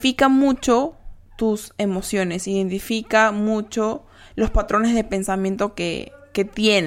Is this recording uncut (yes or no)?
yes